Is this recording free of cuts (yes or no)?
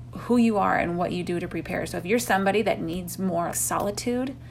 no